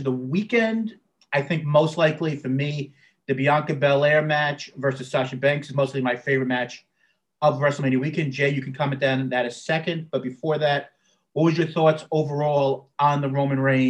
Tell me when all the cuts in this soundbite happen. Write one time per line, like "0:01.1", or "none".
none